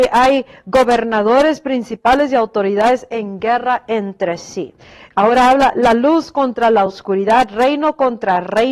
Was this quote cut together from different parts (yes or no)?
no